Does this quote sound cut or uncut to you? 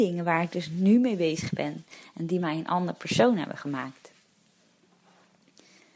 uncut